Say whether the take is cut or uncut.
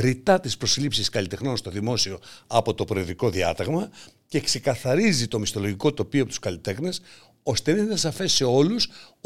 uncut